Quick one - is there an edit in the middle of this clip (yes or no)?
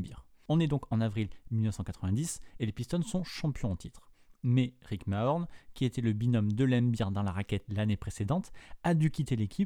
no